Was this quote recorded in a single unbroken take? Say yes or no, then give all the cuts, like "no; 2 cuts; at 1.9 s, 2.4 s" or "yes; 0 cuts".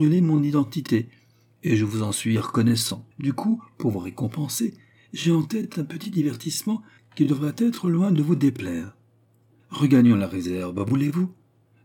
no; 1 cut; at 3.1 s